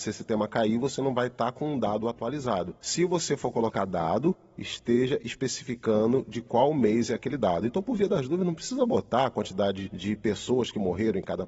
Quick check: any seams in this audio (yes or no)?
no